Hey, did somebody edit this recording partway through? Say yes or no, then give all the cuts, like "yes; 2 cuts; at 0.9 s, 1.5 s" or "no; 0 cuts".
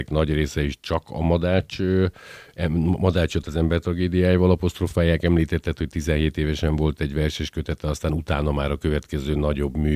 no; 0 cuts